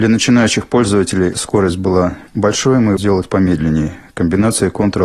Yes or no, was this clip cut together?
yes